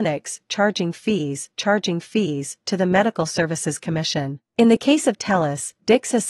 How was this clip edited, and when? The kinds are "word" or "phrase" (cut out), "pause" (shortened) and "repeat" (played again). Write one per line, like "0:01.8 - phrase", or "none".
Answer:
0:01.5 - repeat
0:04.5 - pause